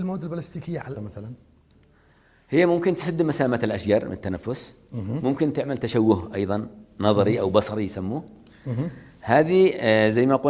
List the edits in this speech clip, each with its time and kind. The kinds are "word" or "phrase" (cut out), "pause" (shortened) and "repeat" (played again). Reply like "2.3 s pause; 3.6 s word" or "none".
1.0 s word